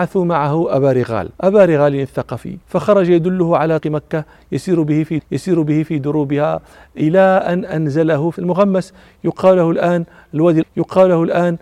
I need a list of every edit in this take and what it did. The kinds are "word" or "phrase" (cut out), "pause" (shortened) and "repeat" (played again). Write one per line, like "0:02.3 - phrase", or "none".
0:01.3 - pause
0:02.6 - pause
0:03.8 - word
0:05.2 - repeat
0:08.4 - word
0:10.6 - repeat